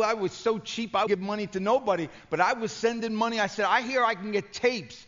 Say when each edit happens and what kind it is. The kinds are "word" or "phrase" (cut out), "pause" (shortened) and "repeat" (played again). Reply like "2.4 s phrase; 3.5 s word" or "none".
1.1 s word

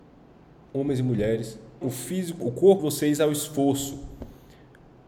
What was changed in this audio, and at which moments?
1.8 s word; 2.8 s word

